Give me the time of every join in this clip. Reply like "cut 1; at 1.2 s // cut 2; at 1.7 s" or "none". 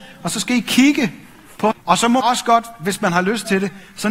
cut 1; at 1.7 s // cut 2; at 2.2 s